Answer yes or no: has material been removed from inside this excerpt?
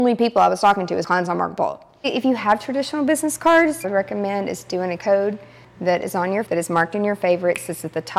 yes